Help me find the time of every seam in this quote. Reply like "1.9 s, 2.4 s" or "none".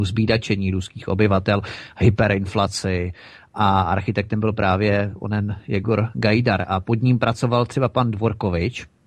none